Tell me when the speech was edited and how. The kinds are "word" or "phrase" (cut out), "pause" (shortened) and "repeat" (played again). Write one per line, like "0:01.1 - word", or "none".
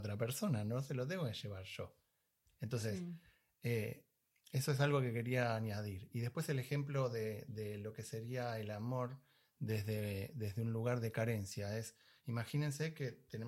none